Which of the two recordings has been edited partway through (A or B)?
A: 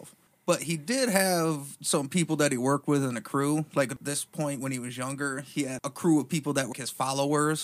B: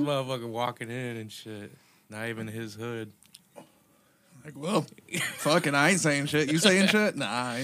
A